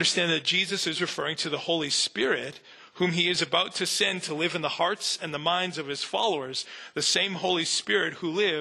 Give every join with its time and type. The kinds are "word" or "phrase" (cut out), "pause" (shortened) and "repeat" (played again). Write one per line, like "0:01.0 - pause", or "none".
none

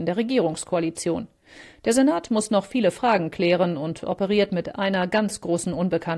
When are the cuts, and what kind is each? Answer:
none

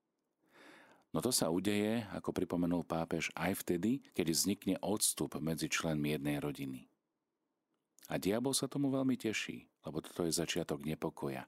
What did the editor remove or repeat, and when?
0:04.1 - pause
0:09.8 - pause

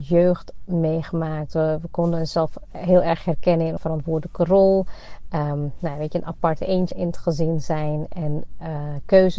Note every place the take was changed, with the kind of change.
0:03.8 - word
0:06.9 - word

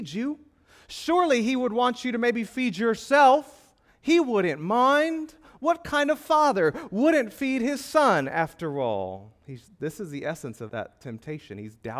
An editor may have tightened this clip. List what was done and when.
0:10.7 - word

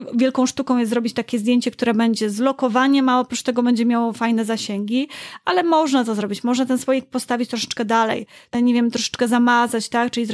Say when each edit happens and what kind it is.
none

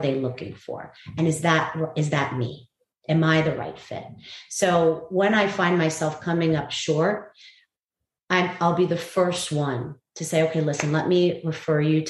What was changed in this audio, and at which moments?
none

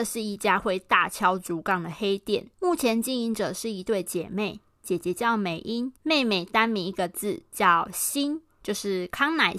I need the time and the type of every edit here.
0:02.5 - pause
0:06.0 - pause

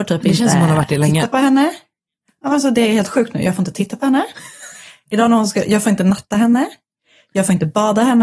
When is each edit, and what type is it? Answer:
none

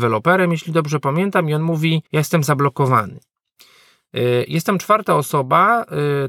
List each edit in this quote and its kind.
0:02.1 - pause

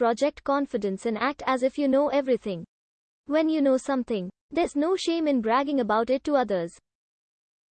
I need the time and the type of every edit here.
0:04.4 - pause

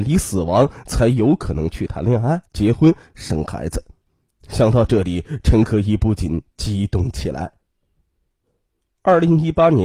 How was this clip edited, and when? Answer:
0:02.5 - pause
0:04.1 - pause

